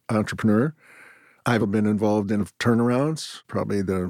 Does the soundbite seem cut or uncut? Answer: cut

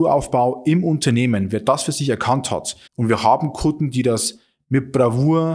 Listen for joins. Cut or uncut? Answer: cut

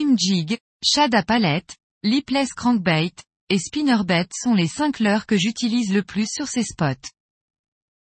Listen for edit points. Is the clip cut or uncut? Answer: uncut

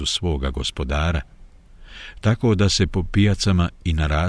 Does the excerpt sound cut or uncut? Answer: uncut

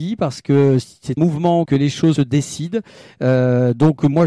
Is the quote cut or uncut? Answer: cut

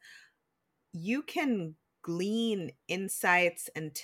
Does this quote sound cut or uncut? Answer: uncut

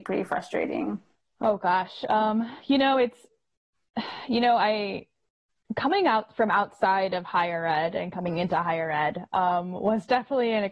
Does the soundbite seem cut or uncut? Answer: uncut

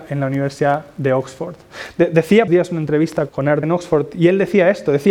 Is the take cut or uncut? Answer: cut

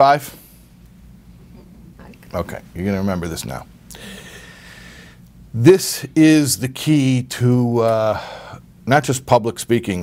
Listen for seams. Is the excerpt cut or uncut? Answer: uncut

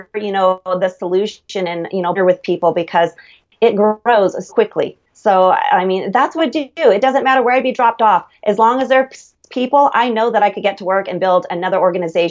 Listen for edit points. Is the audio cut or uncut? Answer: cut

